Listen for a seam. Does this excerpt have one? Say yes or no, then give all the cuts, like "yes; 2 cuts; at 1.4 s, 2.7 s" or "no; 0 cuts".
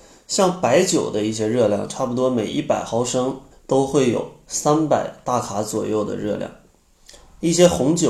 yes; 1 cut; at 3.5 s